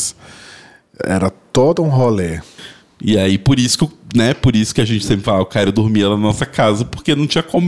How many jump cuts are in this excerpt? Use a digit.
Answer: 0